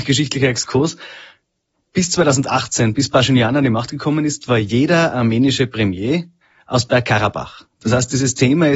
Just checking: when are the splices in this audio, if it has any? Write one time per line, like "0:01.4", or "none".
none